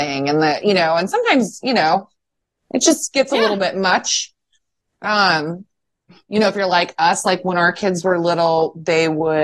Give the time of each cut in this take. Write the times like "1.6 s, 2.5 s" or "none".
none

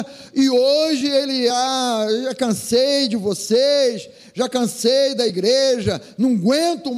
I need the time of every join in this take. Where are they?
none

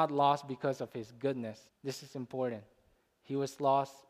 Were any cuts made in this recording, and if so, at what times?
1.7 s

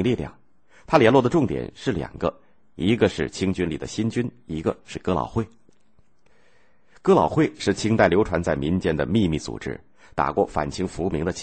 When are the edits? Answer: none

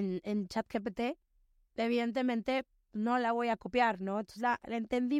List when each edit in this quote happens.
none

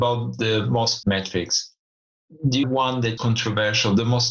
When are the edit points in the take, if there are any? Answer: 1.0 s, 2.6 s, 3.2 s

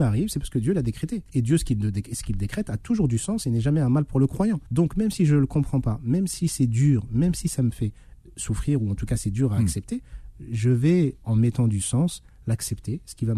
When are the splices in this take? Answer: 1.3 s, 4.7 s

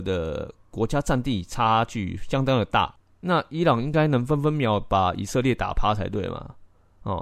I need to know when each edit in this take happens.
none

